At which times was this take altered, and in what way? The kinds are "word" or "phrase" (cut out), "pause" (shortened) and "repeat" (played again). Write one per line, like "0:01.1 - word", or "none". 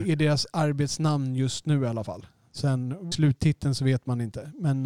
0:03.1 - phrase